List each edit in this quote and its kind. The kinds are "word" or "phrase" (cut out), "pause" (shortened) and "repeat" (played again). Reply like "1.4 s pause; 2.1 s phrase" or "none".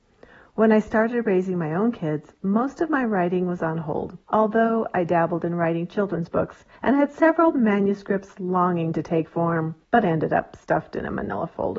4.2 s pause; 6.8 s pause; 9.8 s pause